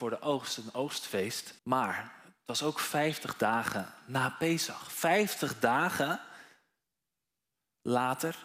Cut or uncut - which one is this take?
cut